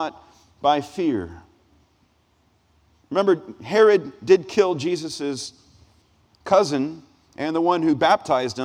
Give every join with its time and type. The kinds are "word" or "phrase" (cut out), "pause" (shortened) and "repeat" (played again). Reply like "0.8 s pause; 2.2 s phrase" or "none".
none